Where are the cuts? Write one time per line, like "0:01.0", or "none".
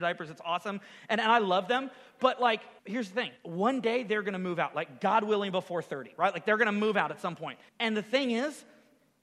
0:02.8
0:03.4
0:07.7